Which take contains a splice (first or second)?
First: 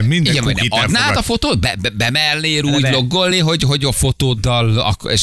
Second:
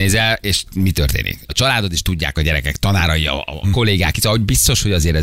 second